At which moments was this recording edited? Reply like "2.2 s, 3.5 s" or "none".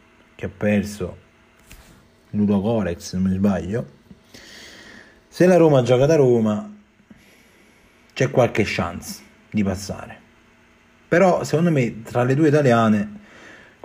none

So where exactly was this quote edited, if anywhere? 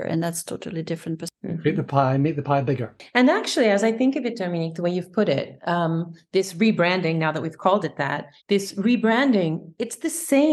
8.4 s

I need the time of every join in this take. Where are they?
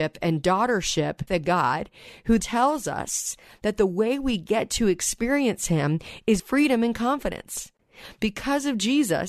1.3 s, 2.4 s, 6.4 s

